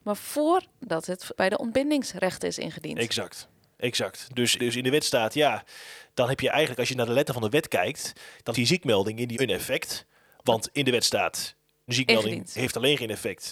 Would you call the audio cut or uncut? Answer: cut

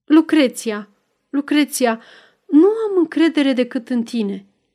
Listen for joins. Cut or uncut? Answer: uncut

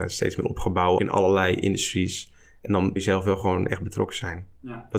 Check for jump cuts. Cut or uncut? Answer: cut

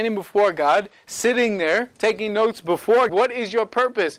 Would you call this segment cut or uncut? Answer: cut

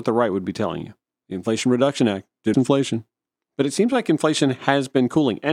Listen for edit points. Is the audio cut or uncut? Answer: cut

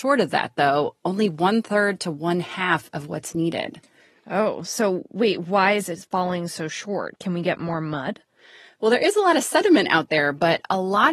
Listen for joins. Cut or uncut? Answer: uncut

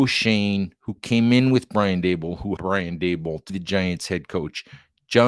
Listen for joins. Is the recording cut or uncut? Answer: cut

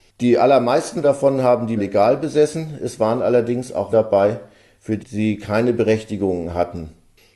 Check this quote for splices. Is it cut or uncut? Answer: cut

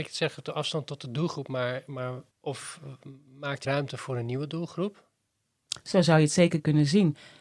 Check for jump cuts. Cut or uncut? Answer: cut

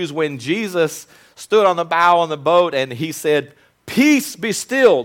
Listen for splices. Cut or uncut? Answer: uncut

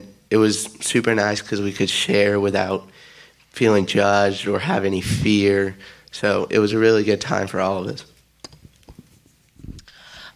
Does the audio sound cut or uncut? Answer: uncut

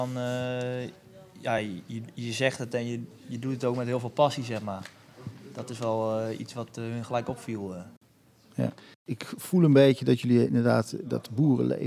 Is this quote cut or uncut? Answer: uncut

